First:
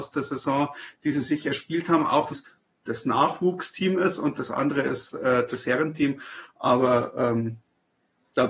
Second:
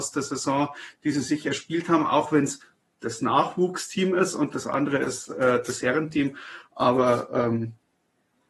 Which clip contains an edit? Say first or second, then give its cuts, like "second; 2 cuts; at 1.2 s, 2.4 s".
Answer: first; 1 cut; at 2.3 s